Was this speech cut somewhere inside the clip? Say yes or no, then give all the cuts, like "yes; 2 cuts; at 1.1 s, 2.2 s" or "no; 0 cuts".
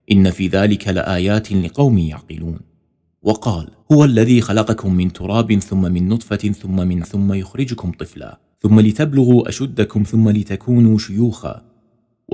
yes; 3 cuts; at 3.8 s, 7.0 s, 8.5 s